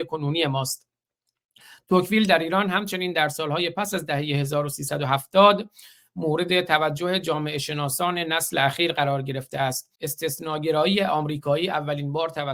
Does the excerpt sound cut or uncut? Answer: cut